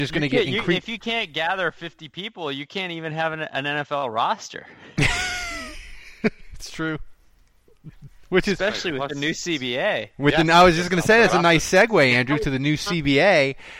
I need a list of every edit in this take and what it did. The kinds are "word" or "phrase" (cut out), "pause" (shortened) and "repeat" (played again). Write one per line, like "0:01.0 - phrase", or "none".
none